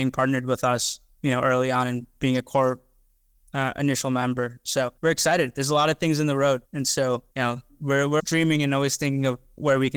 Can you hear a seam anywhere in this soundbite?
yes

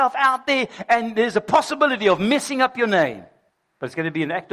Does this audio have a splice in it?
yes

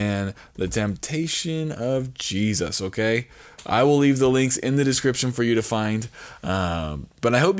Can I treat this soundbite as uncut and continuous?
yes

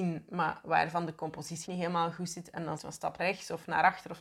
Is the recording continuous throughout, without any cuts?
no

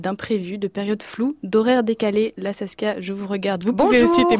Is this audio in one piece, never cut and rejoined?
yes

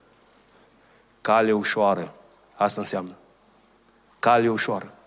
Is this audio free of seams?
yes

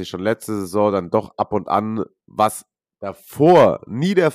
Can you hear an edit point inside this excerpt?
no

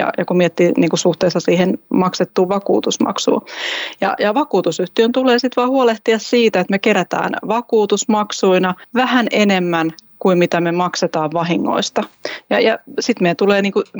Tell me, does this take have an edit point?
no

